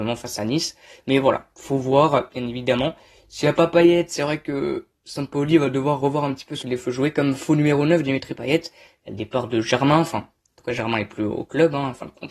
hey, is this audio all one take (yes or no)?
no